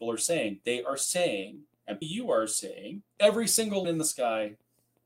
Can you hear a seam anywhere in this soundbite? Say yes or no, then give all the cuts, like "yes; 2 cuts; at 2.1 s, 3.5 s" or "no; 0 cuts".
yes; 3 cuts; at 2.0 s, 3.1 s, 3.8 s